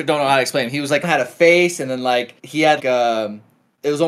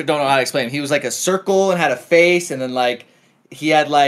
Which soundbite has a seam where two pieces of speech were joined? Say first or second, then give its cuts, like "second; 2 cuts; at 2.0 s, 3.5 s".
first; 3 cuts; at 1.0 s, 2.4 s, 2.8 s